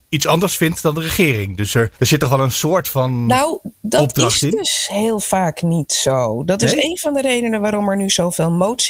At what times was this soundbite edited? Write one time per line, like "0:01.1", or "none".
0:01.9